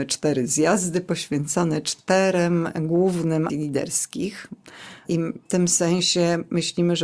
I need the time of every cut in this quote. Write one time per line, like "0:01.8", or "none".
0:03.5
0:05.5